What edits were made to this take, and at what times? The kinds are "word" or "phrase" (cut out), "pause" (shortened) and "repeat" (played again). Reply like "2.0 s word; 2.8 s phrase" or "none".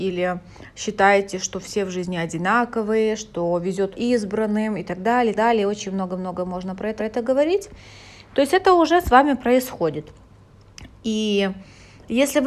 3.9 s word; 5.4 s word; 7.0 s repeat

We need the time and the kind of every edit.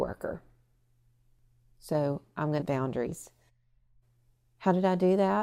2.6 s phrase

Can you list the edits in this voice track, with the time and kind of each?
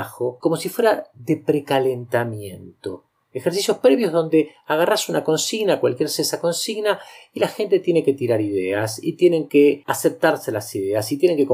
none

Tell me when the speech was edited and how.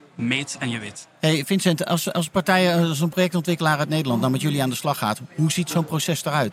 none

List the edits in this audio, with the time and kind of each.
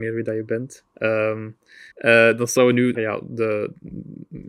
1.9 s pause; 2.6 s phrase; 2.9 s phrase

